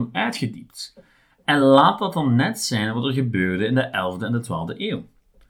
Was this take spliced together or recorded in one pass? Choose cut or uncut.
uncut